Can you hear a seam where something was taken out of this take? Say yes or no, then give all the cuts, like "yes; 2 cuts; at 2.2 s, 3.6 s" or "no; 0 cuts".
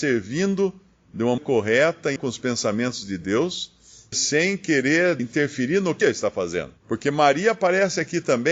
yes; 6 cuts; at 1.4 s, 2.2 s, 4.1 s, 5.2 s, 6.0 s, 6.8 s